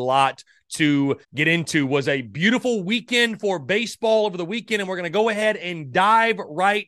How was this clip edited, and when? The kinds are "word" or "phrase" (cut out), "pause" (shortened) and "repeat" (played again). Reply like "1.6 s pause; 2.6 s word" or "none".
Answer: 1.2 s pause

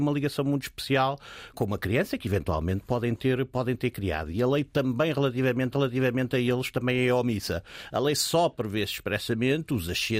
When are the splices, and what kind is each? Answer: 1.5 s word; 5.7 s repeat

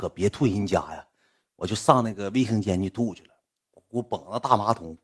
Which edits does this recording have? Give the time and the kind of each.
none

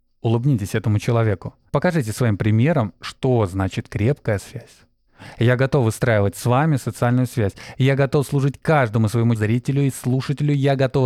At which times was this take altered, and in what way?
1.7 s pause; 4.4 s word; 9.4 s word

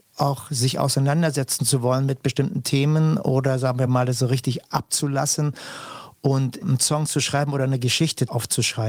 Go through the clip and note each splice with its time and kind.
none

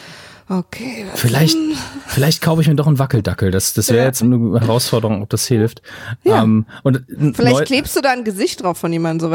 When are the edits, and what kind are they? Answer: 4.2 s word

